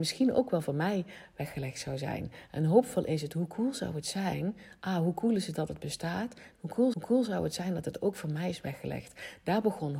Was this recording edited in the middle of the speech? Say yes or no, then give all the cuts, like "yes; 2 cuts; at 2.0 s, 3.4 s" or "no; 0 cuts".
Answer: yes; 1 cut; at 6.9 s